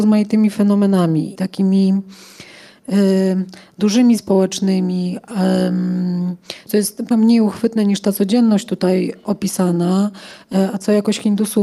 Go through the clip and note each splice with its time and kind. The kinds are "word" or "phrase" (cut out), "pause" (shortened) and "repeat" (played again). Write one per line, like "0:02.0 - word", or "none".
0:01.4 - word
0:04.2 - word
0:06.7 - word
0:07.1 - word